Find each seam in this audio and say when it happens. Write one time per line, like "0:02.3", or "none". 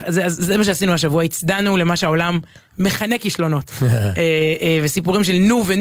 none